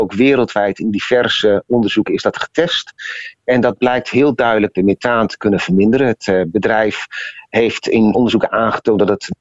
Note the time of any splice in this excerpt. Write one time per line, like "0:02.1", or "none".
0:08.1